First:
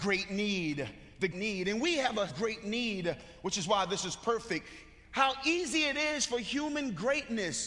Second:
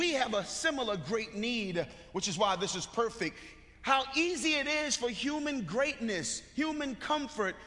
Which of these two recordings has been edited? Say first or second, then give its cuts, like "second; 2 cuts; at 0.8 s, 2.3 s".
first; 2 cuts; at 1.3 s, 2.3 s